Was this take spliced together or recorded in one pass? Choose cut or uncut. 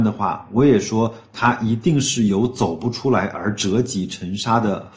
uncut